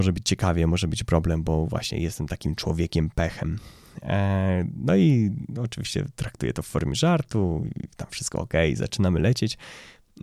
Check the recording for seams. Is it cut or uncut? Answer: uncut